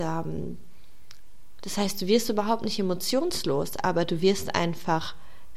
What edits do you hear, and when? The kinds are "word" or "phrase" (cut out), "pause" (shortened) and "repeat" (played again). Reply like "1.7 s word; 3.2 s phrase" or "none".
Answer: none